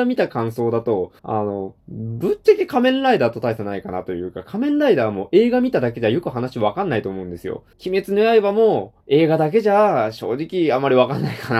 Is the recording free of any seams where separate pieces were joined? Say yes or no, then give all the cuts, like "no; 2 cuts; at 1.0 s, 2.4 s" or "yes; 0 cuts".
no; 4 cuts; at 1.2 s, 1.8 s, 7.7 s, 9.0 s